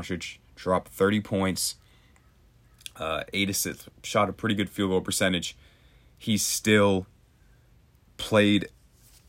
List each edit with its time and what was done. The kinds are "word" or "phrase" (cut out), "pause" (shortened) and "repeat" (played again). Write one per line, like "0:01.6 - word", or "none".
none